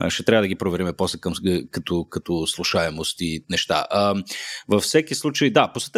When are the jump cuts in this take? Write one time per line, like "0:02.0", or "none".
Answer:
none